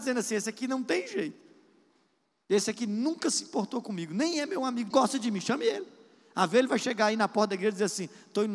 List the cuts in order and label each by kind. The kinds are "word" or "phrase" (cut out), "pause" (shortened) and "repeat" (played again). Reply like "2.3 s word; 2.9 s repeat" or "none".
4.9 s phrase